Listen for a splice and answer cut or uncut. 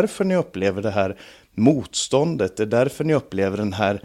uncut